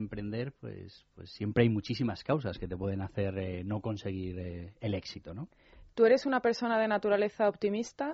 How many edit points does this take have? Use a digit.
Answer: 0